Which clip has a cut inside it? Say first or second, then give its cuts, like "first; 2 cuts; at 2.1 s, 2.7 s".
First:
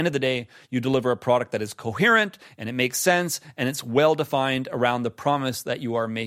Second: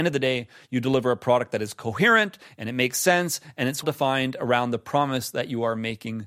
second; 1 cut; at 3.8 s